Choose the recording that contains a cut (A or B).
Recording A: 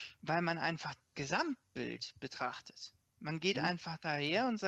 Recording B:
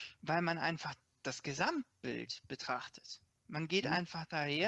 A